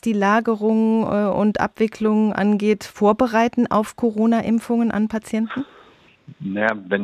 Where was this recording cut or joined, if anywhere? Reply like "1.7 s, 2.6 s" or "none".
none